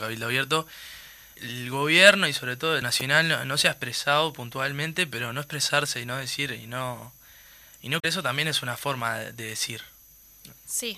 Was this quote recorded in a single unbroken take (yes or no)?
no